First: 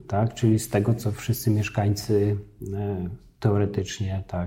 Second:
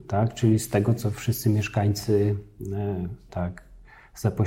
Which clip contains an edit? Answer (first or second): second